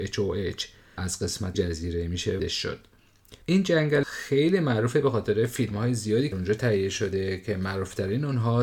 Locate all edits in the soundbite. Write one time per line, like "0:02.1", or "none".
0:01.0
0:01.5
0:02.4
0:03.4
0:04.0
0:06.3